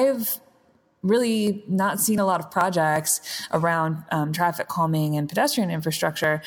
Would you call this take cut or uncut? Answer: uncut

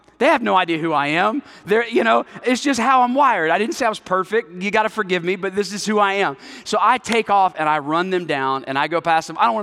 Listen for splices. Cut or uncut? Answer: uncut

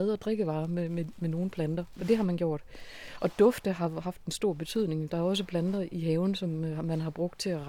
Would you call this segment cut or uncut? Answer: uncut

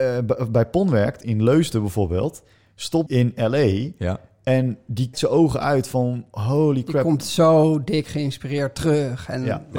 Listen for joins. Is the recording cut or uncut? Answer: cut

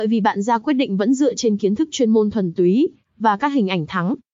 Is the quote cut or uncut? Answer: uncut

